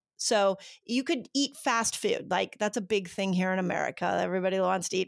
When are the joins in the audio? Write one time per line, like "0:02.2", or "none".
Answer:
none